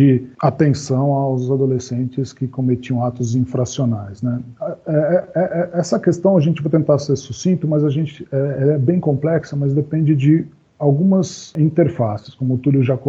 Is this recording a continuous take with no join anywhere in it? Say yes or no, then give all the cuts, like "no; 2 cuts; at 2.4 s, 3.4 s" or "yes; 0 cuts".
yes; 0 cuts